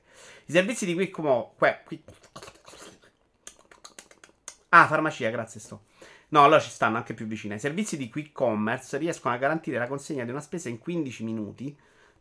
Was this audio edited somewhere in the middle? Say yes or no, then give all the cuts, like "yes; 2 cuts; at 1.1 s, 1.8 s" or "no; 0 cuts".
no; 0 cuts